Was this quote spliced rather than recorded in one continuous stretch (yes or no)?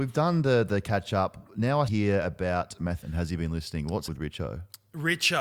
yes